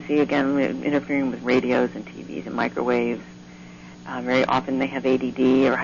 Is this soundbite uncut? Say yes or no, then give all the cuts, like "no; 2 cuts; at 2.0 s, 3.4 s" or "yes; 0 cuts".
yes; 0 cuts